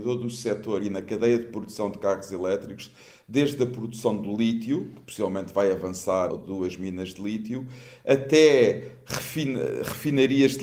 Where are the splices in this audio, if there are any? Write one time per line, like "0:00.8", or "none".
0:06.3